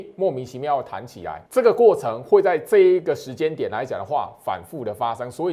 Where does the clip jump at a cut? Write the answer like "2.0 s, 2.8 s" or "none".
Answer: 1.5 s